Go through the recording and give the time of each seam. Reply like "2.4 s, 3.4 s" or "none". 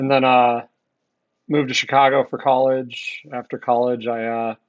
none